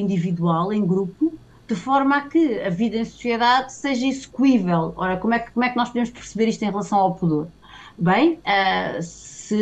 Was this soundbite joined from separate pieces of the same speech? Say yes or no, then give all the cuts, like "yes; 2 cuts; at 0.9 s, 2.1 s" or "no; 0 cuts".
no; 0 cuts